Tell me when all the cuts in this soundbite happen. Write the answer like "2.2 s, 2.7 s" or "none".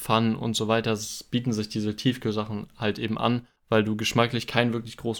3.6 s